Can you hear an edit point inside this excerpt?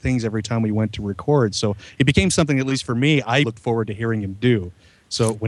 yes; 1 cut; at 3.4 s

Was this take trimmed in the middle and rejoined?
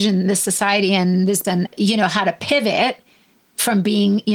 yes; 1 cut; at 1.4 s

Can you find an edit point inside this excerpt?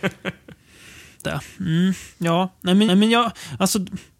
yes; 2 cuts; at 1.2 s, 2.9 s

